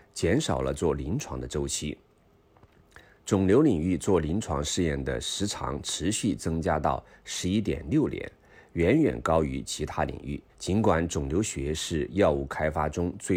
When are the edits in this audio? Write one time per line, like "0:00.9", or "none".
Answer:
0:10.5